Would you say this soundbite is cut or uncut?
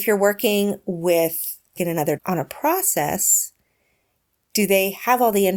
cut